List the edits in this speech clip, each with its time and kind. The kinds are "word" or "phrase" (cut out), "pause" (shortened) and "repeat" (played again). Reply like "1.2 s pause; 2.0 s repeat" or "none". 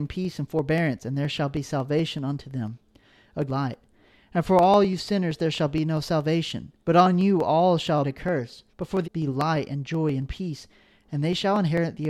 3.5 s word; 6.8 s pause; 8.0 s word; 8.7 s pause; 9.0 s phrase